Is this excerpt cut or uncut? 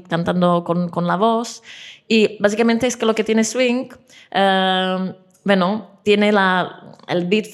uncut